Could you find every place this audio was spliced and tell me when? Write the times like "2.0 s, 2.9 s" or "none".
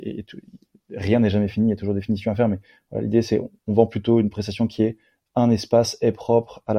none